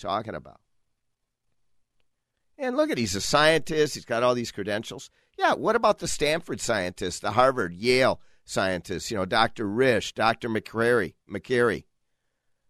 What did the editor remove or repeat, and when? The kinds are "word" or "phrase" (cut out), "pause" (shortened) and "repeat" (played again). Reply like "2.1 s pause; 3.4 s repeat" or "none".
none